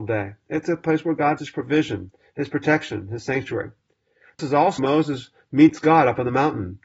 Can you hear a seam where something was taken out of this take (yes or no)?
yes